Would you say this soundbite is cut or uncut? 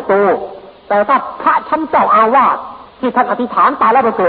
cut